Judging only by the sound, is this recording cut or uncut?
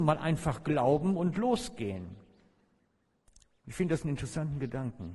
uncut